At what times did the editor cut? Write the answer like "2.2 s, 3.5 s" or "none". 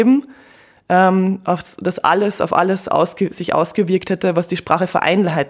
none